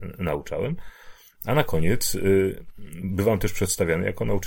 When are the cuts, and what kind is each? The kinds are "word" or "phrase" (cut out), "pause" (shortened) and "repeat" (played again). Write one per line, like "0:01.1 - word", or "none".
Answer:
none